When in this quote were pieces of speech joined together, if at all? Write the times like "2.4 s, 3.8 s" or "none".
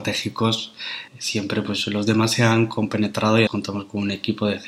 1.1 s, 3.5 s